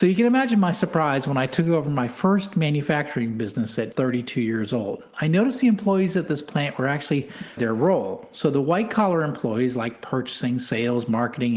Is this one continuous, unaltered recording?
no; 2 cuts; at 3.9 s, 7.6 s

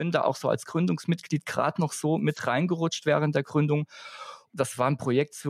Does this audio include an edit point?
no; 0 cuts

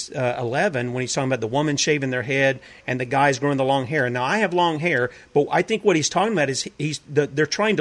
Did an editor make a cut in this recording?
no; 0 cuts

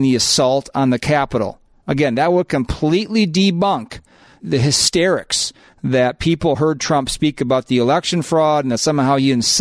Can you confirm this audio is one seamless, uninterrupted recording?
yes; 0 cuts

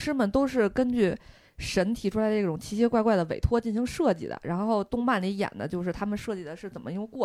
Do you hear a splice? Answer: no; 0 cuts

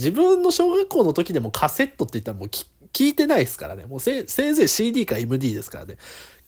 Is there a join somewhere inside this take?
no; 0 cuts

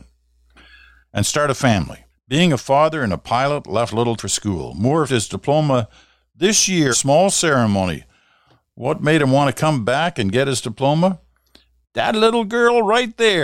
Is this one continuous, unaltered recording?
no; 4 cuts; at 2.1 s, 4.2 s, 5.1 s, 6.9 s

